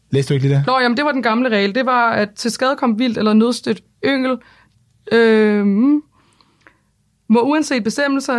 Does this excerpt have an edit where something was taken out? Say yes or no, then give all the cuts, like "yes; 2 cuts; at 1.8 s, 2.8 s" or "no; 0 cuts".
no; 0 cuts